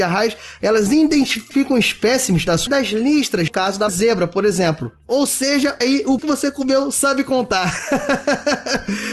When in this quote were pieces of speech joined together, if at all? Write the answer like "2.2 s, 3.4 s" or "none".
2.7 s, 3.5 s, 3.9 s, 5.8 s, 6.2 s